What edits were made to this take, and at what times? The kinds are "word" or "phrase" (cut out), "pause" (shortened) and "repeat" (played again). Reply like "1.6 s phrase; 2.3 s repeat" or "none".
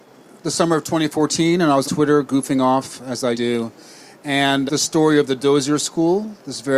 1.8 s word; 3.3 s word; 4.7 s word